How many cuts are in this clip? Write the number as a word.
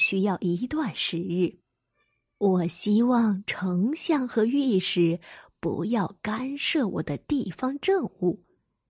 zero